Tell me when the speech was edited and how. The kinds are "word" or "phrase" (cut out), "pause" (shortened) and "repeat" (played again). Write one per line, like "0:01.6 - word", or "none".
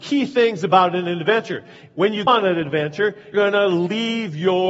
0:02.3 - word
0:03.3 - word